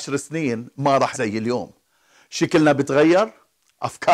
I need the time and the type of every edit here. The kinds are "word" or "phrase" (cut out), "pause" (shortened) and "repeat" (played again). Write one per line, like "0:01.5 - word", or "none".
0:01.1 - word